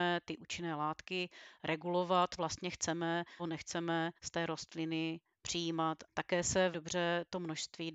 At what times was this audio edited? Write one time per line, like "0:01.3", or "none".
0:02.4
0:03.4
0:04.1
0:06.1
0:06.7